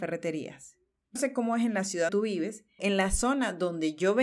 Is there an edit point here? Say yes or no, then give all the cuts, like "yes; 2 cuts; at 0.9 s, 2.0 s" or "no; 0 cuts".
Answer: yes; 3 cuts; at 1.2 s, 2.1 s, 2.8 s